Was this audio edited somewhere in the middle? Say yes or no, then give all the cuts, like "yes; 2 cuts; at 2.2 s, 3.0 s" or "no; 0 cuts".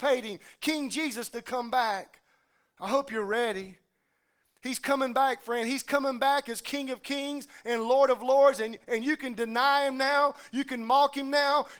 no; 0 cuts